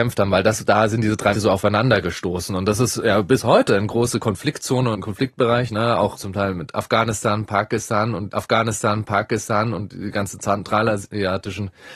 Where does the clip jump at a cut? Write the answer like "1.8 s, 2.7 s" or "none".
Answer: 1.3 s, 4.9 s, 6.1 s, 8.3 s